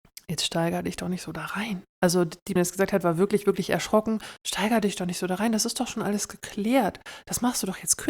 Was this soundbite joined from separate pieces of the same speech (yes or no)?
yes